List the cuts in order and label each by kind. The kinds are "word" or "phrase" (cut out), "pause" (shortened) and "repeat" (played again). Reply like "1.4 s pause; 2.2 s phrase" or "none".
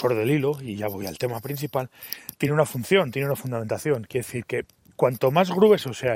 none